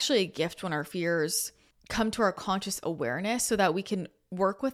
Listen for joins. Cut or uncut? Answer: cut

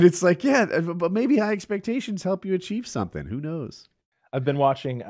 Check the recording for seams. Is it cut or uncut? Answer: uncut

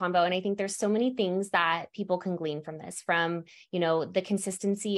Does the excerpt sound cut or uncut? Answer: uncut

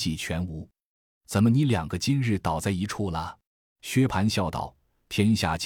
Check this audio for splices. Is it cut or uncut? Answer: cut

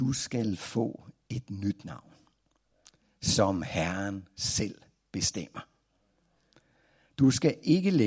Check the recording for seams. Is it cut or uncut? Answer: uncut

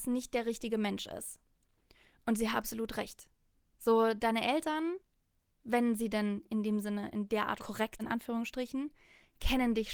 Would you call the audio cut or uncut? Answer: cut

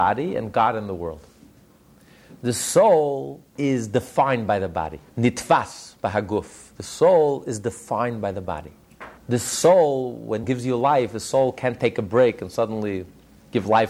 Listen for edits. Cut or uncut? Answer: cut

